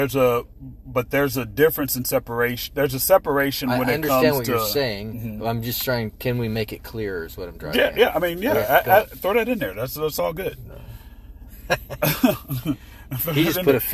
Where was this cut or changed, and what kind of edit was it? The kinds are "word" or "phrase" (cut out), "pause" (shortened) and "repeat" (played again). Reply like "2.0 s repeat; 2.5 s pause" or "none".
none